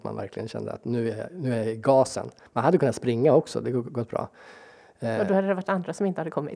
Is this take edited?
no; 0 cuts

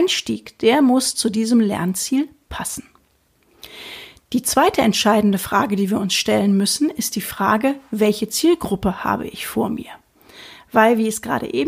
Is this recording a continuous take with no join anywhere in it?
yes; 0 cuts

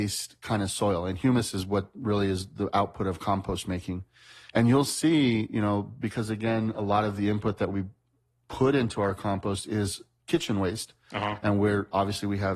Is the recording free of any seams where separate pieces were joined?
yes; 0 cuts

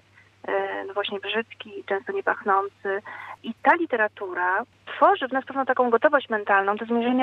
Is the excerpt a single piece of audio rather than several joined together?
yes; 0 cuts

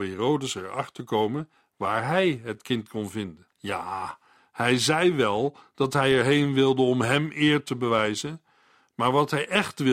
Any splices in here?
yes; 1 cut; at 3.5 s

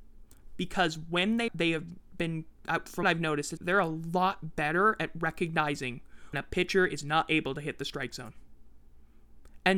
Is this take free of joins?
no; 4 cuts; at 1.5 s, 3.0 s, 3.6 s, 6.3 s

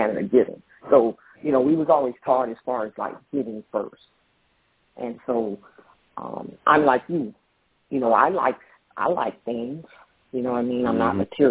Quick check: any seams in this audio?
no; 0 cuts

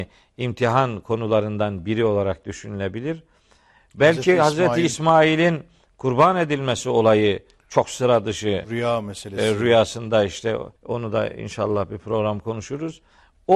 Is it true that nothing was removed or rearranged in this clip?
no; 1 cut; at 10.8 s

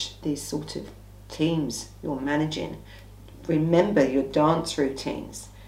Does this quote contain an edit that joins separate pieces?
no; 0 cuts

